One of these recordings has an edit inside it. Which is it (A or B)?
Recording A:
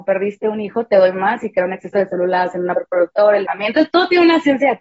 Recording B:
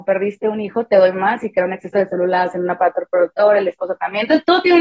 A